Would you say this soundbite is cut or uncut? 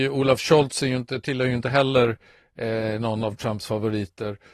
uncut